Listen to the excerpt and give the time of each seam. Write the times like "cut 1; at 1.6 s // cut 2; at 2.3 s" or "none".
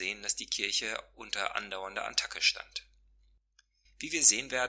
none